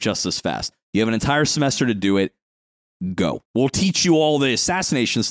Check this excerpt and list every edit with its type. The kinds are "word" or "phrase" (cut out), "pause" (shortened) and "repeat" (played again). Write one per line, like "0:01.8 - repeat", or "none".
0:03.4 - pause